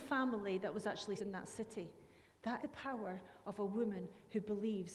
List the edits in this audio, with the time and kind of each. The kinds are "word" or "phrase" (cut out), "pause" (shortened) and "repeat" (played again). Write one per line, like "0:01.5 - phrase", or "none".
0:01.2 - word
0:02.6 - word